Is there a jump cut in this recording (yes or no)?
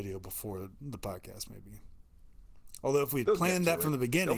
no